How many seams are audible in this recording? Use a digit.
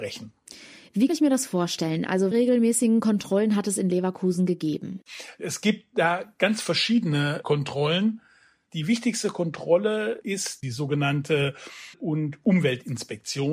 3